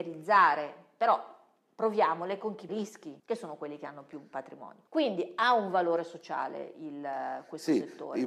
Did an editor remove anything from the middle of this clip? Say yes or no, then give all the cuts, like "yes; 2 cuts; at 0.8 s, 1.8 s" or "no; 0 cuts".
yes; 3 cuts; at 2.7 s, 3.2 s, 4.9 s